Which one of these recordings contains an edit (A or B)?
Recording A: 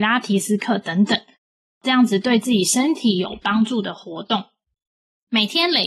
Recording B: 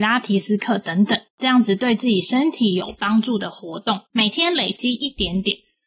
B